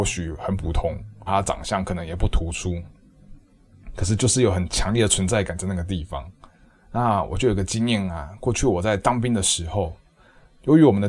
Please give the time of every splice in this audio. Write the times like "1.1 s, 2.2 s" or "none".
1.3 s, 6.6 s